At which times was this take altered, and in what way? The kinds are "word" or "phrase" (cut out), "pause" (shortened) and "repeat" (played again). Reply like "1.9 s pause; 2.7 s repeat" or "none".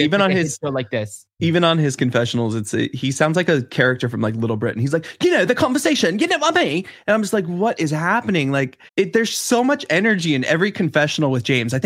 1.3 s pause; 8.9 s pause